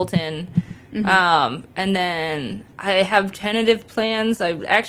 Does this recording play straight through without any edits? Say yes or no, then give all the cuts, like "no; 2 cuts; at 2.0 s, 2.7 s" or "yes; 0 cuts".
no; 1 cut; at 2.7 s